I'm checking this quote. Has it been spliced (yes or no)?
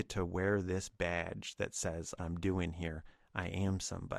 yes